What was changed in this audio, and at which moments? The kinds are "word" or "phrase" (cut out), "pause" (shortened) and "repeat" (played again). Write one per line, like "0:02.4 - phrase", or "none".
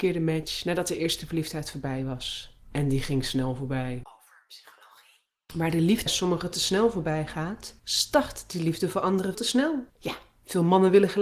0:02.6 - pause
0:06.1 - word
0:07.8 - pause
0:09.3 - word
0:09.9 - pause